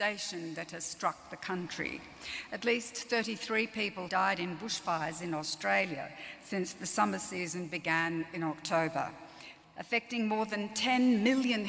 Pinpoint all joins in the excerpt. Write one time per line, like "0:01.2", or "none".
0:04.1